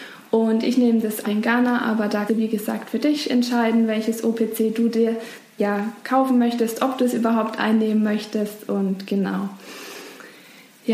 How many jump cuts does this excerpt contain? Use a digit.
3